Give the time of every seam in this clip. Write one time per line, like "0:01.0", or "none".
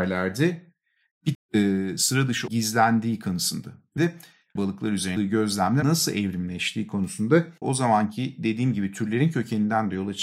0:01.3
0:02.5
0:04.0
0:04.6
0:05.2
0:05.8
0:07.6